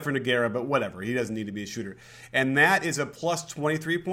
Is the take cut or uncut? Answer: uncut